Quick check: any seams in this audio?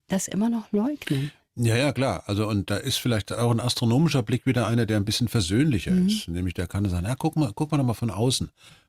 no; 0 cuts

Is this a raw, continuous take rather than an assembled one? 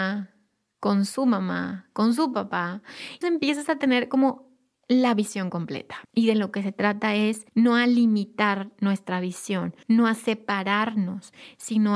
no; 4 cuts; at 3.2 s, 6.0 s, 7.5 s, 9.8 s

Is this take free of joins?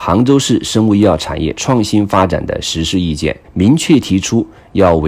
no; 1 cut; at 3.4 s

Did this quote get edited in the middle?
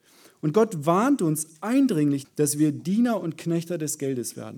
yes; 1 cut; at 2.2 s

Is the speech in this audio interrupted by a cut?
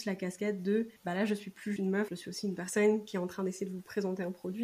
yes; 3 cuts; at 1.0 s, 1.8 s, 2.1 s

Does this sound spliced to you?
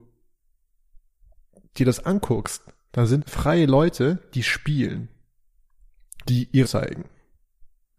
yes; 4 cuts; at 2.0 s, 3.2 s, 6.2 s, 6.6 s

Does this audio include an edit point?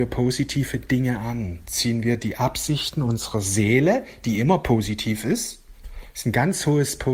no; 0 cuts

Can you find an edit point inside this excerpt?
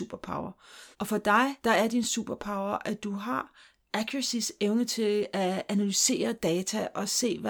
yes; 2 cuts; at 0.9 s, 1.6 s

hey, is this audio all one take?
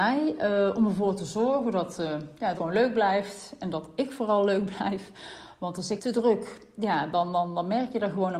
no; 2 cuts; at 2.6 s, 6.0 s

